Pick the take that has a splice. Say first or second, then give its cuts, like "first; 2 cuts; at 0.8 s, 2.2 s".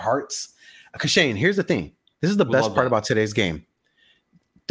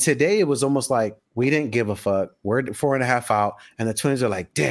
second; 1 cut; at 1.3 s